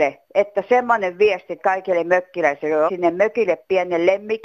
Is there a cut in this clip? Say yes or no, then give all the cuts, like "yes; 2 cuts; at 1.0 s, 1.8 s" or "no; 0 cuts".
yes; 2 cuts; at 1.6 s, 2.9 s